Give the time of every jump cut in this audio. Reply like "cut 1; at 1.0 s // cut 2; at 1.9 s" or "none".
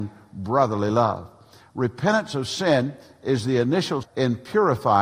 cut 1; at 4.0 s